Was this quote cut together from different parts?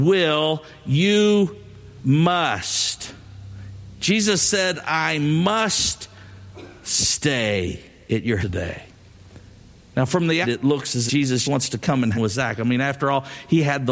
yes; 5 cuts; at 8.4 s, 10.4 s, 11.1 s, 11.4 s, 12.1 s

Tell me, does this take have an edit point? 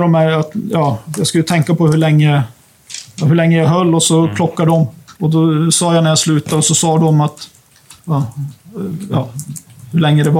yes; 2 cuts; at 5.1 s, 8.0 s

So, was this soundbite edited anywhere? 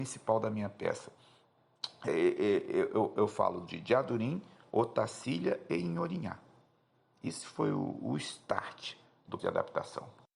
yes; 2 cuts; at 2.1 s, 9.4 s

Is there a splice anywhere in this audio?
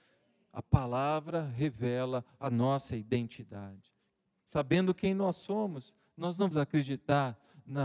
yes; 1 cut; at 6.5 s

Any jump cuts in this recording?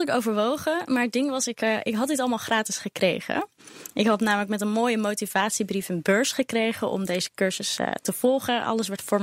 no; 0 cuts

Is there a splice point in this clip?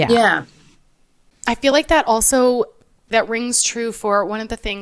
no; 0 cuts

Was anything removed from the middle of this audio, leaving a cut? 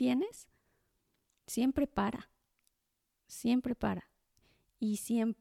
no; 0 cuts

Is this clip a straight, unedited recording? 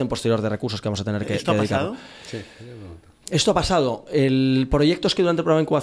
yes; 0 cuts

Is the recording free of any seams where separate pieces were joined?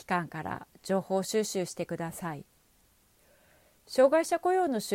yes; 0 cuts

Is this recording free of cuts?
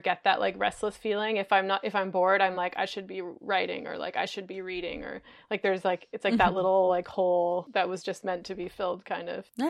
yes; 0 cuts

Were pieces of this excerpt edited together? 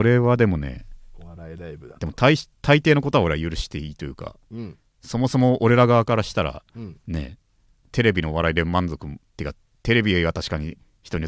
no; 0 cuts

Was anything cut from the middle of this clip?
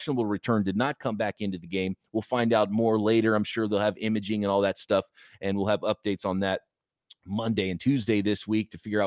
no; 0 cuts

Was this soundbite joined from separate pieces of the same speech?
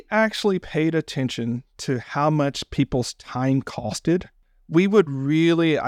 no; 0 cuts

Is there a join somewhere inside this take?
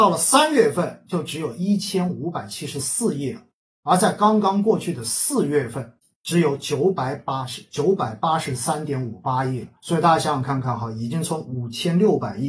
yes; 2 cuts; at 6.0 s, 9.8 s

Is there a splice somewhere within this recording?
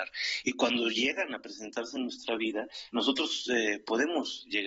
no; 0 cuts

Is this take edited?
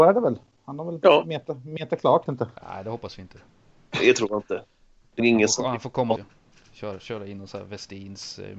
yes; 4 cuts; at 2.3 s, 2.6 s, 5.2 s, 6.2 s

